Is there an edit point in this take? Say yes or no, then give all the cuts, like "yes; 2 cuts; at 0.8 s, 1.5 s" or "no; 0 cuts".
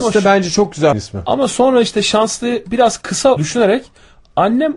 yes; 2 cuts; at 0.9 s, 3.4 s